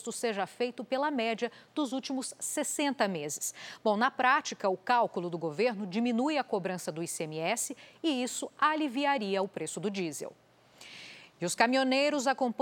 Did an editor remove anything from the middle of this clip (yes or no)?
no